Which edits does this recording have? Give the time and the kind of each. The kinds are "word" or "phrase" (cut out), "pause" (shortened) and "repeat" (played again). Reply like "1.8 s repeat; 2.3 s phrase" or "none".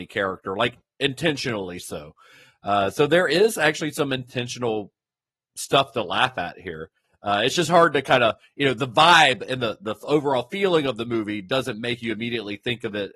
none

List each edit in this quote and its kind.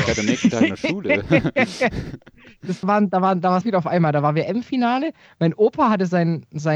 2.8 s word; 3.6 s word

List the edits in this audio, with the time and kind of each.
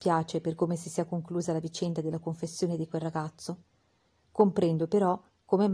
none

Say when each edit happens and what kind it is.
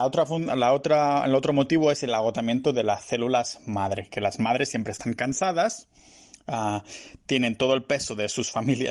none

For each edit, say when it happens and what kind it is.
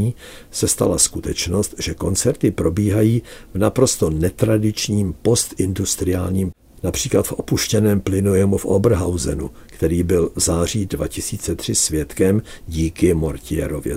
6.5 s word

